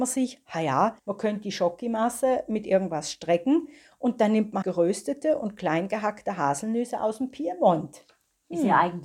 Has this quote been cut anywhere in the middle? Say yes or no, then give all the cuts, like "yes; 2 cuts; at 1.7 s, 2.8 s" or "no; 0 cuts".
yes; 2 cuts; at 1.0 s, 4.6 s